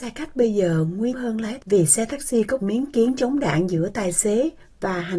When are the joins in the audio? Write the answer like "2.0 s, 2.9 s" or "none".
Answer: 1.1 s, 1.6 s, 2.6 s